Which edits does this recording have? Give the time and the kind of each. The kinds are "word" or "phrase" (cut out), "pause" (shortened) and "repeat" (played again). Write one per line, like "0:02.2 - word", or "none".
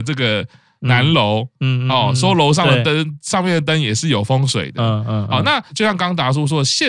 none